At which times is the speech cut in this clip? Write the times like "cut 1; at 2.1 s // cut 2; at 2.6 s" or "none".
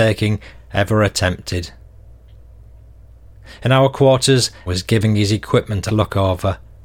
cut 1; at 4.7 s // cut 2; at 5.9 s